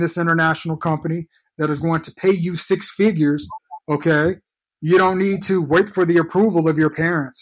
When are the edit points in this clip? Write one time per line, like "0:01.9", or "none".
none